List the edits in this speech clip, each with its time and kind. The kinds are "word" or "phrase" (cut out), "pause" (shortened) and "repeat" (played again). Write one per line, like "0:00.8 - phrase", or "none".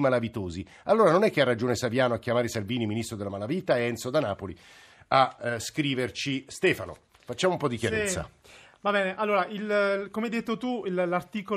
none